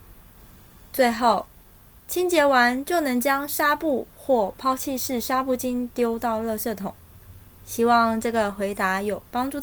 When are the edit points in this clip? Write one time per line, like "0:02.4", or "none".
none